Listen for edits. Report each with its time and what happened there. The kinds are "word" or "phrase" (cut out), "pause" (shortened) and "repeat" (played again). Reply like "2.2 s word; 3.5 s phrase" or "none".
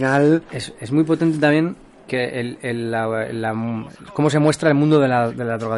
none

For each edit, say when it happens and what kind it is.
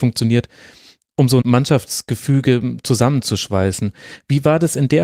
1.4 s word

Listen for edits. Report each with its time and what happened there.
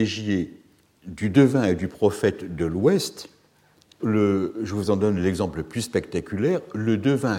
4.0 s word

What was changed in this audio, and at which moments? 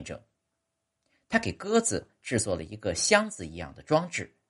none

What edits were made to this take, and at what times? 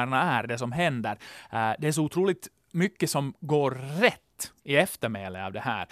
none

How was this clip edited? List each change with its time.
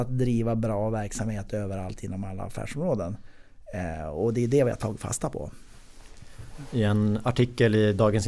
none

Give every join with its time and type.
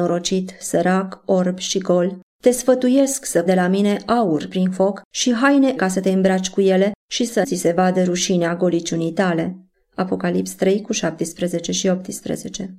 2.3 s pause; 3.5 s word; 4.5 s word; 5.1 s pause; 5.8 s word; 7.0 s pause; 7.4 s word; 9.7 s pause

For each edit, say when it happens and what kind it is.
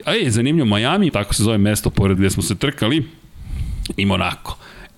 1.1 s word; 2.2 s word

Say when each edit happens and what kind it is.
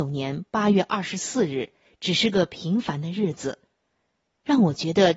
none

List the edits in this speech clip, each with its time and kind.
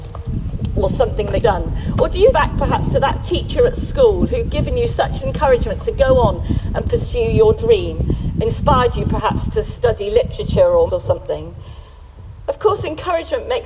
1.4 s word; 2.3 s word; 10.9 s word

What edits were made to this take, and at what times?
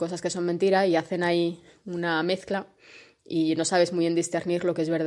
none

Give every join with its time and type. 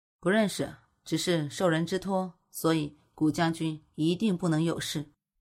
none

